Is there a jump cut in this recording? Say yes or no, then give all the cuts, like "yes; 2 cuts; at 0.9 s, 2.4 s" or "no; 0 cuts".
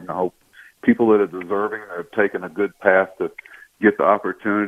no; 0 cuts